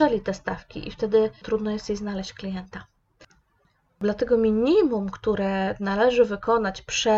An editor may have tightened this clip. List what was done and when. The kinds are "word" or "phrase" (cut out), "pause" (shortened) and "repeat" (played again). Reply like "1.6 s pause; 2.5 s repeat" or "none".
1.4 s word